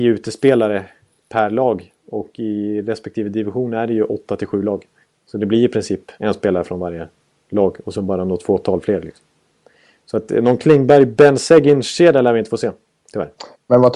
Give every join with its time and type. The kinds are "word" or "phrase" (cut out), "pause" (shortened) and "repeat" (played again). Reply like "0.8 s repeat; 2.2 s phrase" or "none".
5.0 s pause; 6.2 s pause